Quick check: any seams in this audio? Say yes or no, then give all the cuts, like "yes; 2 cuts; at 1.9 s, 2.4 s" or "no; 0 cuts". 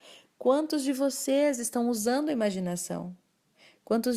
no; 0 cuts